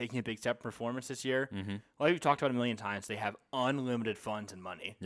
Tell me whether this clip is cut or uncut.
uncut